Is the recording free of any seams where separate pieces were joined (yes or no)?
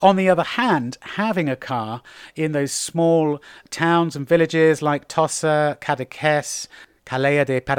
yes